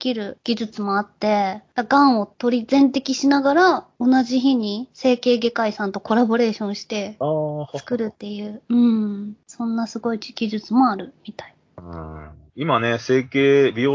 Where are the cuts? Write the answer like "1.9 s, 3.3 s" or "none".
12.5 s

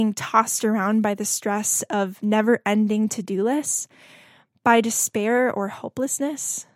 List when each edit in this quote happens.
none

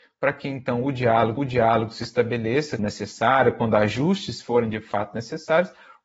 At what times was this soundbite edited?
1.4 s, 2.8 s

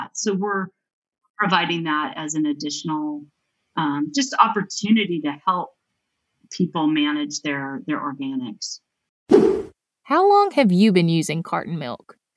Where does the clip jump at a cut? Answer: none

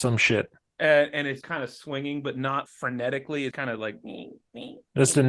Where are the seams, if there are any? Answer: 1.4 s, 2.7 s, 3.5 s

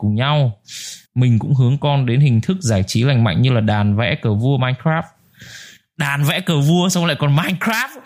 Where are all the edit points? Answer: 1.1 s

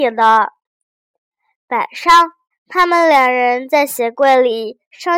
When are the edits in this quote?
2.5 s

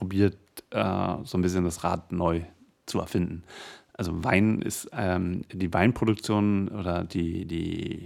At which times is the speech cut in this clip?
none

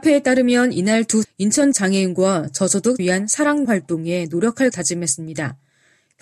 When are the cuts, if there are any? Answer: 1.2 s, 1.7 s, 3.0 s, 3.6 s, 4.7 s

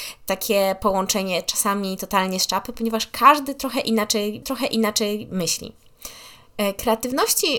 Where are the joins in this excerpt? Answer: 4.4 s

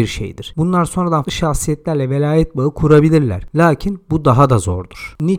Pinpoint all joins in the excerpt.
1.2 s

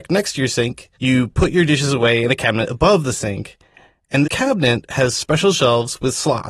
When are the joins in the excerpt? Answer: 0.9 s, 4.2 s

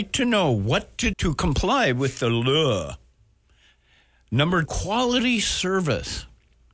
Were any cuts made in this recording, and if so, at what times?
1.1 s, 4.7 s

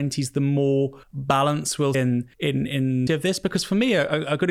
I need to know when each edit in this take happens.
1.0 s, 1.9 s, 2.3 s, 3.1 s

